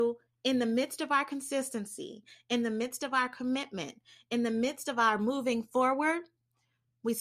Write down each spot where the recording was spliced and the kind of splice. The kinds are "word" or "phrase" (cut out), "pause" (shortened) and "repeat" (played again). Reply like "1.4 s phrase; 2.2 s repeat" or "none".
none